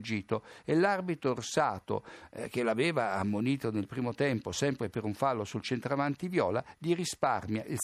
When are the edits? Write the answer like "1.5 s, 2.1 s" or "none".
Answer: none